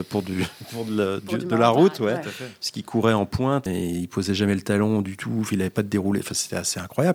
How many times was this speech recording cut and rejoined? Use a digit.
1